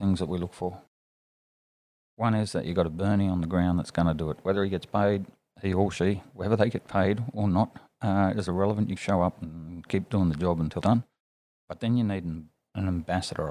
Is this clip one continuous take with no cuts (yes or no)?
no